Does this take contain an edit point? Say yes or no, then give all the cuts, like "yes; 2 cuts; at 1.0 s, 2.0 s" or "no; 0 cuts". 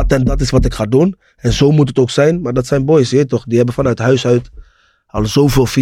no; 0 cuts